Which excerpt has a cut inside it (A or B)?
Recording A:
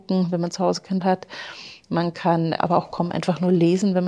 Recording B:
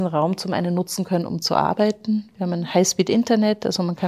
A